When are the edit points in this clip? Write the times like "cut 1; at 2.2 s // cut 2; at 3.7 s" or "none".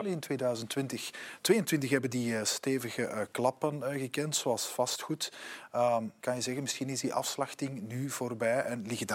cut 1; at 6.2 s